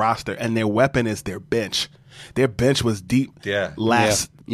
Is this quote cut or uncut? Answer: uncut